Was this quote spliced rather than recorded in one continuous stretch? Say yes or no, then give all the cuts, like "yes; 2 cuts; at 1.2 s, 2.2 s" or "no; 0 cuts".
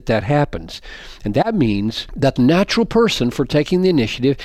yes; 1 cut; at 2.4 s